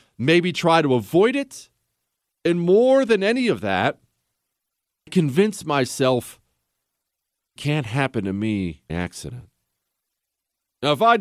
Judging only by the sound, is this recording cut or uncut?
cut